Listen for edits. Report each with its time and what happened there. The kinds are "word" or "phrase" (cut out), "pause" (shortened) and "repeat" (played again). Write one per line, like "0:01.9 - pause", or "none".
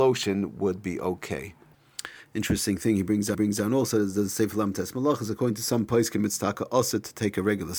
0:03.3 - repeat

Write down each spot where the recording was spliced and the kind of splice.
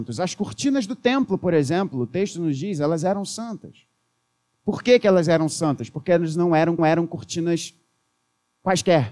0:06.8 - repeat

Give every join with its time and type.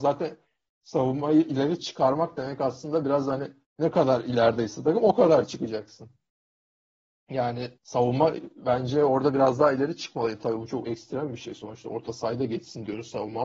0:03.6 - pause
0:07.8 - pause

